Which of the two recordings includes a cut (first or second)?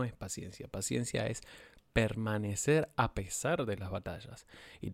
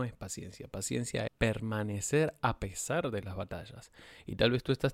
second